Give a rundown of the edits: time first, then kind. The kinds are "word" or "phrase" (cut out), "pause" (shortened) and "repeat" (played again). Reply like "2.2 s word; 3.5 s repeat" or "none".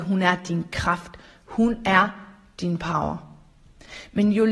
none